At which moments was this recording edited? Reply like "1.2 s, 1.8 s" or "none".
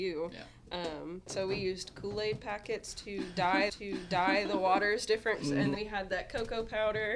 3.7 s, 5.4 s, 5.7 s